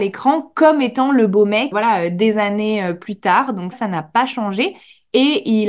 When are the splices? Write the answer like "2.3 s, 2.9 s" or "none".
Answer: 1.7 s, 3.7 s